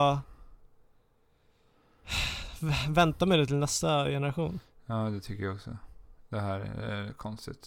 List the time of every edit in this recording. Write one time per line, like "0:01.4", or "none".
none